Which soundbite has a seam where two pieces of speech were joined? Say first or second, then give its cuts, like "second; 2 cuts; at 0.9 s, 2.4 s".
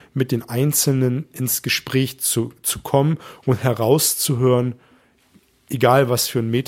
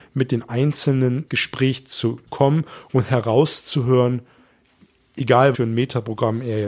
second; 3 cuts; at 1.3 s, 2.3 s, 5.5 s